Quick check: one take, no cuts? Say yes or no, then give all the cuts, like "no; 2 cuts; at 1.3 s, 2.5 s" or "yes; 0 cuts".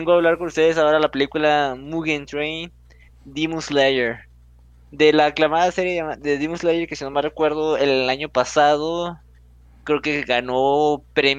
yes; 0 cuts